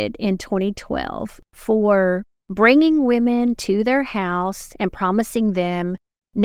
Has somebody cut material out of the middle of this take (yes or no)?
yes